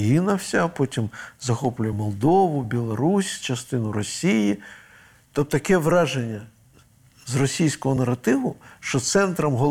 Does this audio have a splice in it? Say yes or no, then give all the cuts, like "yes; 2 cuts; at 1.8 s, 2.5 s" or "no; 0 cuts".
no; 0 cuts